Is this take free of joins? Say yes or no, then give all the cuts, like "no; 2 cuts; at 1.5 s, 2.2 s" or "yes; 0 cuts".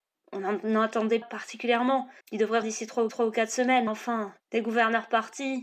no; 6 cuts; at 1.2 s, 2.2 s, 2.6 s, 3.1 s, 3.9 s, 4.4 s